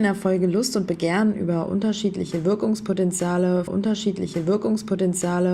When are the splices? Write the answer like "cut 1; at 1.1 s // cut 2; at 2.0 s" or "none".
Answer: cut 1; at 3.7 s

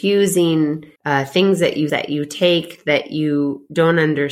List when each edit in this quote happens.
cut 1; at 1.0 s // cut 2; at 1.9 s

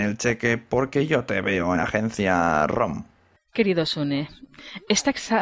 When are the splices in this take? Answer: cut 1; at 1.7 s

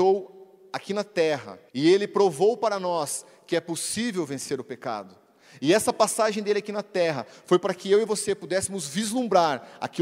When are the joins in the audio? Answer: cut 1; at 1.7 s

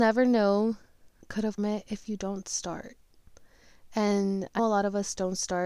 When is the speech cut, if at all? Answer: cut 1; at 1.2 s // cut 2; at 1.6 s // cut 3; at 4.6 s

